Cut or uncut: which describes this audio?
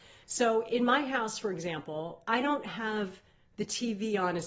uncut